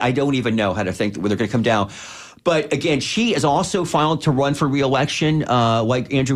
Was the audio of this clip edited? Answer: no; 0 cuts

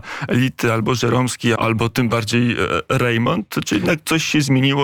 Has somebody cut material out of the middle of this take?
yes; 1 cut; at 1.6 s

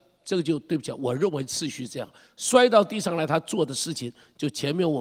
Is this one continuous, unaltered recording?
yes; 0 cuts

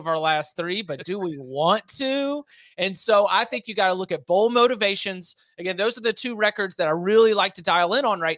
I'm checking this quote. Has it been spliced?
no; 0 cuts

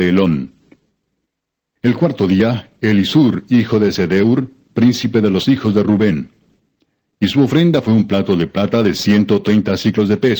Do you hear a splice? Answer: no; 0 cuts

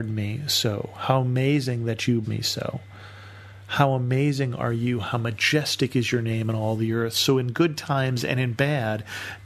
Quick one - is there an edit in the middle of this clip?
yes; 1 cut; at 2.2 s

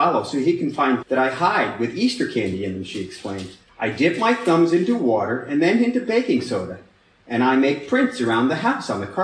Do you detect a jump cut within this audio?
yes; 2 cuts; at 1.0 s, 3.7 s

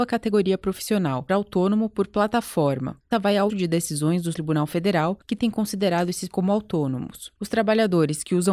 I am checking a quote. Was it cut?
yes; 6 cuts; at 1.3 s, 3.1 s, 3.5 s, 4.3 s, 5.4 s, 6.3 s

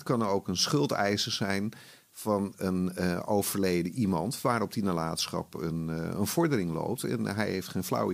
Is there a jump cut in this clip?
no; 0 cuts

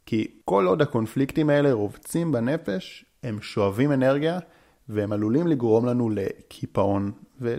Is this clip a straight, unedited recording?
yes; 0 cuts

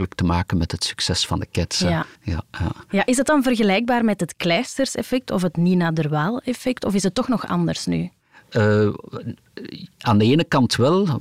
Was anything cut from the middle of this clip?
yes; 2 cuts; at 2.2 s, 9.9 s

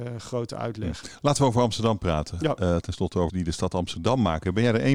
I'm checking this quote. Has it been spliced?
yes; 2 cuts; at 2.8 s, 3.3 s

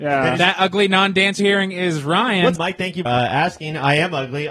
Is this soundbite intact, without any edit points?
no; 3 cuts; at 1.4 s, 2.5 s, 3.0 s

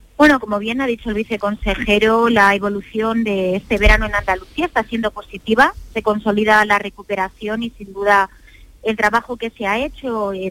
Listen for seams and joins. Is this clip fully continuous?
yes; 0 cuts

